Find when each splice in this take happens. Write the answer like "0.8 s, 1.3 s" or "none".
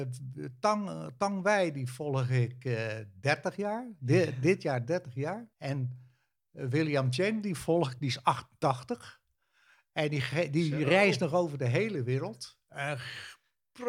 5.5 s